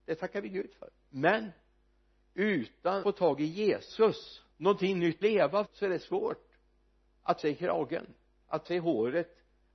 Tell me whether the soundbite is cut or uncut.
cut